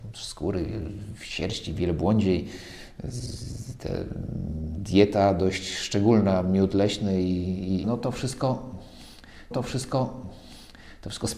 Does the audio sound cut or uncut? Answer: cut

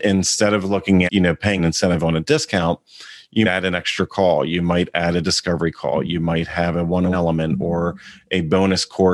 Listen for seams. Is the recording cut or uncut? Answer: cut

